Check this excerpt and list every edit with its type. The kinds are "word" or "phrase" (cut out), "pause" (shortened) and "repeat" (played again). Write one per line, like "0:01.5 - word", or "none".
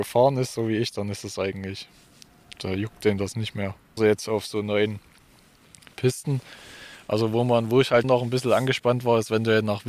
0:04.0 - word
0:08.0 - word